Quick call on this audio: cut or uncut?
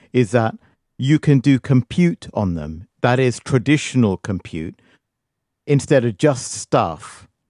uncut